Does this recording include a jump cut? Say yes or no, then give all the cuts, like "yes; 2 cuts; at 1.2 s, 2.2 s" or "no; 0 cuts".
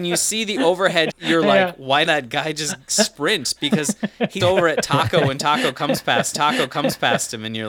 yes; 4 cuts; at 1.1 s, 2.0 s, 4.4 s, 6.3 s